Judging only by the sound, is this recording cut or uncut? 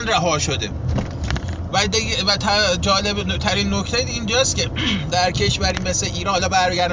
uncut